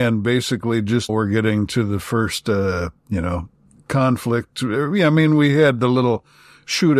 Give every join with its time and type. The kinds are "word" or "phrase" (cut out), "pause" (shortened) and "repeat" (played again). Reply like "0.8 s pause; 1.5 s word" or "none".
1.1 s word

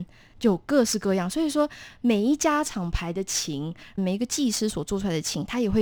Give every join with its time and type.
4.0 s word

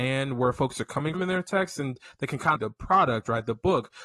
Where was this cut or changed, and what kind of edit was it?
1.1 s word; 2.6 s phrase

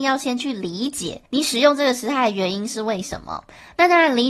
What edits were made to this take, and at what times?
1.3 s pause

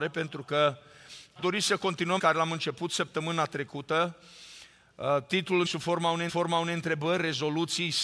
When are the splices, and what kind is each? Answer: 1.4 s word; 2.2 s word; 5.7 s word; 6.3 s repeat

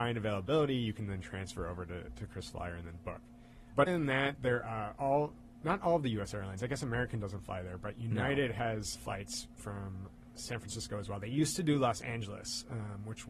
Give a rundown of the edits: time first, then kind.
3.9 s word; 4.6 s word; 8.9 s word; 9.6 s word

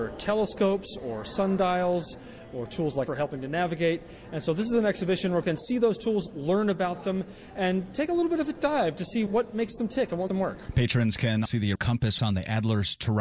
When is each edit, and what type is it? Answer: 3.1 s word; 5.4 s word; 8.5 s word; 9.3 s word; 10.3 s word; 11.4 s word; 11.7 s word; 12.2 s word

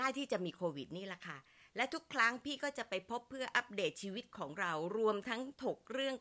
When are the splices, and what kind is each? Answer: none

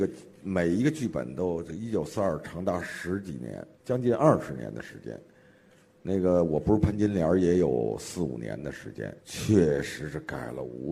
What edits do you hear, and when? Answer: 3.7 s pause; 9.2 s pause

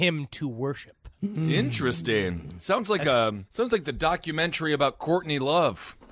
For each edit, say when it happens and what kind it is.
3.5 s pause

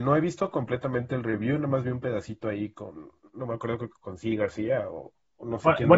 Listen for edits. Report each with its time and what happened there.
none

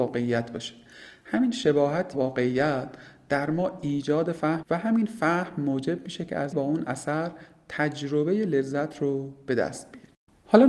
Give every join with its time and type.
2.1 s word; 4.6 s word; 6.5 s word

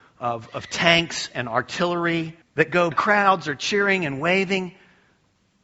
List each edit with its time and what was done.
2.4 s pause; 2.9 s phrase

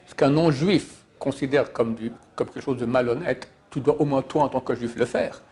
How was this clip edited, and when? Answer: none

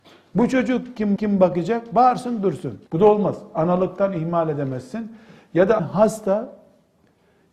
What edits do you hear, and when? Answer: 1.2 s repeat; 2.9 s pause; 5.8 s word

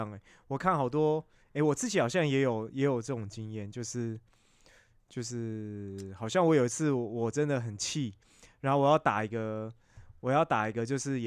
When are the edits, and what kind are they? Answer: none

